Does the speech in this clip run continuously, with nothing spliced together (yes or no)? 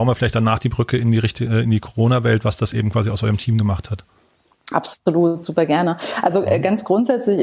yes